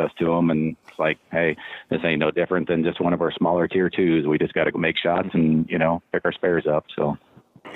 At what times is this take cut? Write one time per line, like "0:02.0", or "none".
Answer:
0:04.7